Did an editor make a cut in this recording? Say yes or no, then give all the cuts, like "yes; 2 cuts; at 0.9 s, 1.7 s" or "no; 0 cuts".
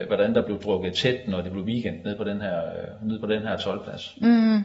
no; 0 cuts